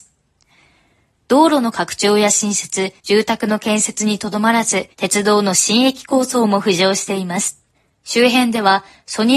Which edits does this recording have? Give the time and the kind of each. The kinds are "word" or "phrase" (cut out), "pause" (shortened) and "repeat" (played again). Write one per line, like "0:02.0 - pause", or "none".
0:03.0 - pause
0:04.9 - pause
0:07.7 - pause